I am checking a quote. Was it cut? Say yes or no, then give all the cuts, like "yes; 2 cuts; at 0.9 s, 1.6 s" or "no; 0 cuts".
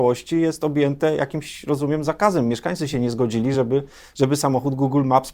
no; 0 cuts